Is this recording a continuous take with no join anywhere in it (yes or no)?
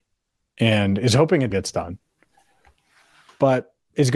no